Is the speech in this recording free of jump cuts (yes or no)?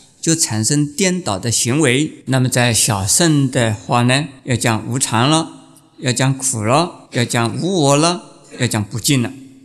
no